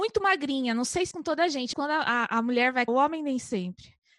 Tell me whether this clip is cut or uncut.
cut